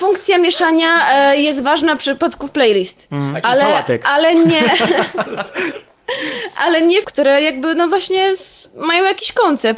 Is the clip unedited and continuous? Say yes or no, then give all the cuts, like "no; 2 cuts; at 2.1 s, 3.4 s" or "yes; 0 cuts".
no; 1 cut; at 7.0 s